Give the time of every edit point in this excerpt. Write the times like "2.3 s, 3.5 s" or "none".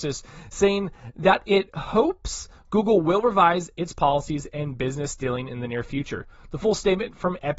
none